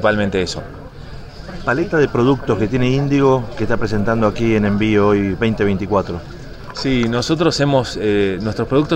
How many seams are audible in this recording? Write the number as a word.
zero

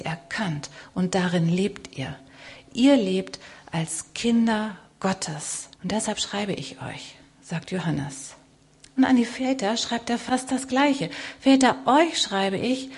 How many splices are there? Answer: two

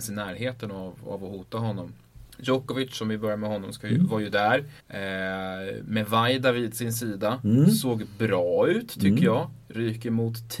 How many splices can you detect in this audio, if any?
two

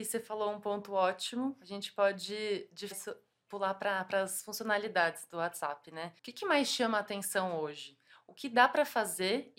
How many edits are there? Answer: two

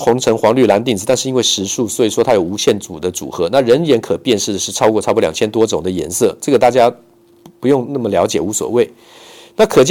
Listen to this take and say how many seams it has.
zero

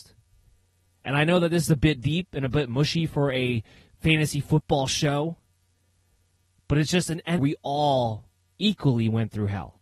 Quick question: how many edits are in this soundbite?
one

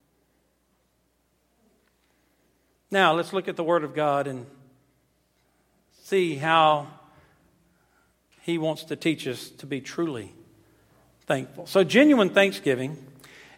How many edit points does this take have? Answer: zero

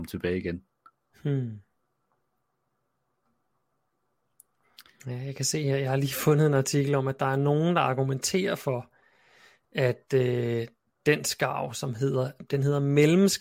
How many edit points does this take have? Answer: zero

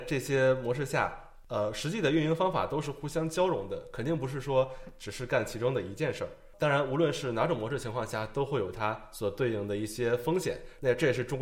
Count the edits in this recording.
zero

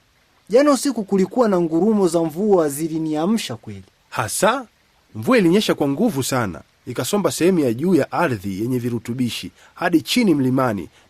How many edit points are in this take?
one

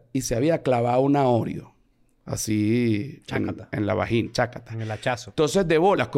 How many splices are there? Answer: zero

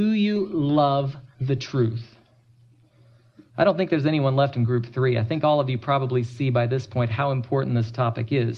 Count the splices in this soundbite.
two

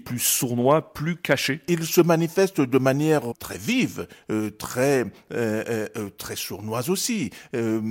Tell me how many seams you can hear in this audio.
one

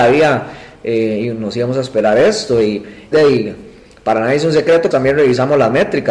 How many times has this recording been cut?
two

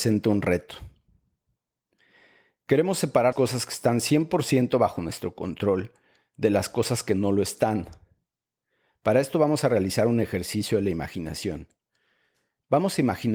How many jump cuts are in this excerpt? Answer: one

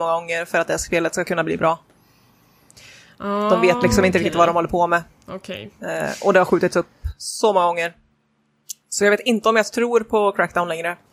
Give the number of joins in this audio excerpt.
zero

